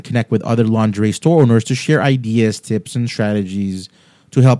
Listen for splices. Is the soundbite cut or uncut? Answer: uncut